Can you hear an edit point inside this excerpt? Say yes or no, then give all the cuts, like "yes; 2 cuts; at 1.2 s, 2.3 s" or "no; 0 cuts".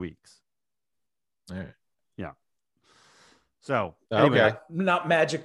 yes; 1 cut; at 4.0 s